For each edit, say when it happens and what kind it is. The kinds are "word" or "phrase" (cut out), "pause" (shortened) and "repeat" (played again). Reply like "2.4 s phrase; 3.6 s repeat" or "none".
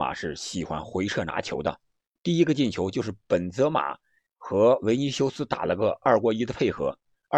none

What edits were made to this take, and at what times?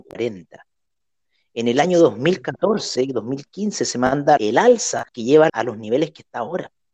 4.4 s word; 5.1 s pause; 5.5 s phrase

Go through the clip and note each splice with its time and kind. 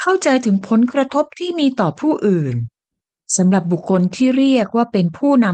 none

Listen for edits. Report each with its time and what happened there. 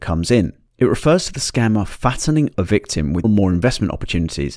2.5 s word; 3.2 s word

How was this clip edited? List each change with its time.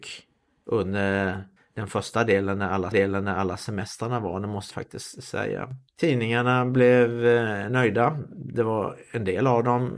1.6 s pause; 2.9 s repeat; 4.7 s word; 5.9 s pause

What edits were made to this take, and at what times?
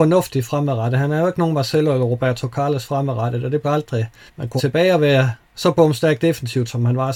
3.6 s phrase; 4.3 s pause; 4.6 s phrase; 5.4 s pause

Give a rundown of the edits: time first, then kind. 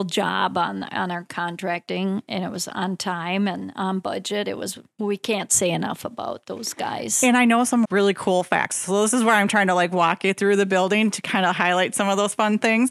7.8 s word

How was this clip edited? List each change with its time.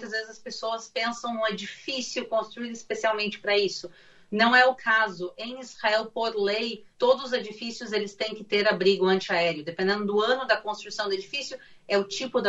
6.9 s pause

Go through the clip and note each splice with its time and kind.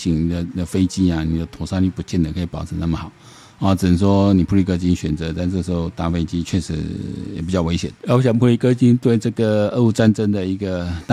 8.0 s pause

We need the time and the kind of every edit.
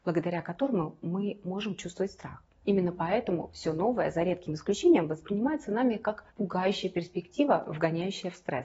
6.3 s pause

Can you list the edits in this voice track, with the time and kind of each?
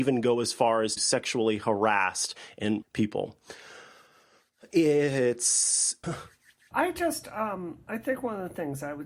1.0 s word; 2.8 s word; 6.0 s word; 6.7 s word

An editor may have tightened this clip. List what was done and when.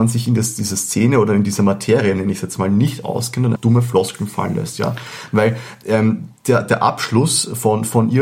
3.6 s word

